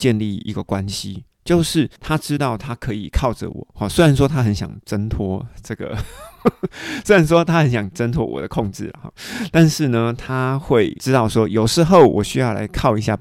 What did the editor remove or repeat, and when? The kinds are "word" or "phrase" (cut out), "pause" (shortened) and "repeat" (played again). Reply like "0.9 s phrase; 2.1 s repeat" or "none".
2.0 s pause